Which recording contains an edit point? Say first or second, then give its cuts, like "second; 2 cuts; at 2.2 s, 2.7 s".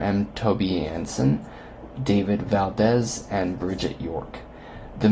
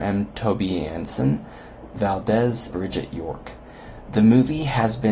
second; 2 cuts; at 1.9 s, 2.7 s